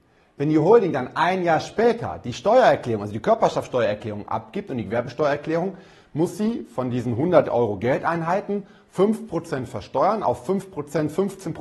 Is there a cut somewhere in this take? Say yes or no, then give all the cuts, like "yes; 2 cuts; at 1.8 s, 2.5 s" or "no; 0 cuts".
no; 0 cuts